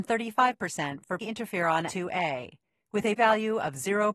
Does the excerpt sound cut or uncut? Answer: cut